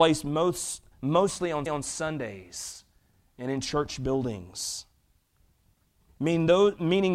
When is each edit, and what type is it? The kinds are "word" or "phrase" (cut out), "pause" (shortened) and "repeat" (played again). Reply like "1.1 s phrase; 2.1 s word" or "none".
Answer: 0.9 s pause; 1.7 s repeat

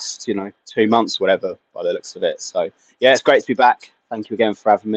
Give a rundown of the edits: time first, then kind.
none

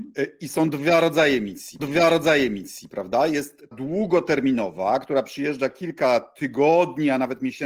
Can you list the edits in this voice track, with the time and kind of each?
1.8 s repeat; 3.7 s word

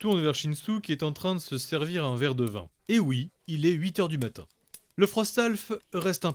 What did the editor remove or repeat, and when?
2.8 s pause; 3.4 s pause

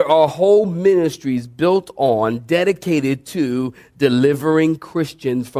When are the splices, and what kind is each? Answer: none

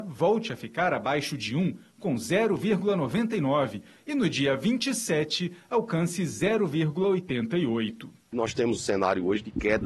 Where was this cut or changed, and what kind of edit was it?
8.8 s word

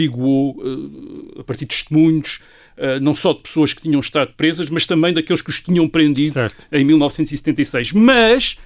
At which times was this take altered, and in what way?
none

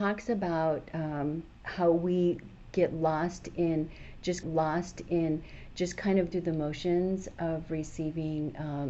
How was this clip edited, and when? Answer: 1.5 s pause; 4.4 s repeat; 6.3 s word

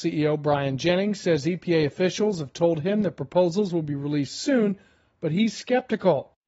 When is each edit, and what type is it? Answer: none

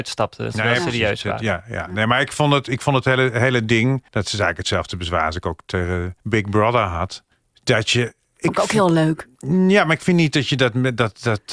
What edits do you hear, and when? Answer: 4.1 s pause; 6.2 s pause; 7.3 s pause

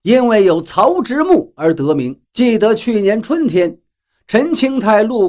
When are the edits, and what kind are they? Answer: 2.3 s pause

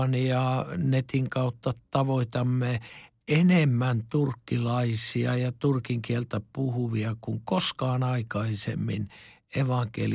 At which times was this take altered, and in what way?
none

